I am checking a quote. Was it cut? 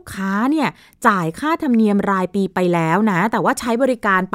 no; 0 cuts

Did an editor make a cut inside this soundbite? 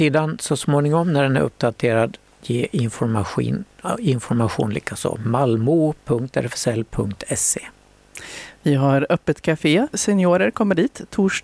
yes; 2 cuts; at 2.4 s, 9.9 s

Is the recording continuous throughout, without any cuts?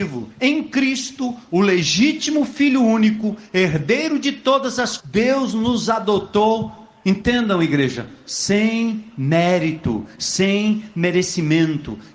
no; 1 cut; at 5.0 s

